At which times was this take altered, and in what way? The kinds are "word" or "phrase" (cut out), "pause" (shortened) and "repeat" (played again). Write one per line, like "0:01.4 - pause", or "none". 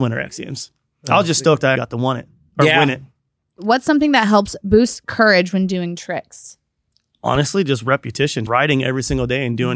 0:01.8 - word
0:08.5 - word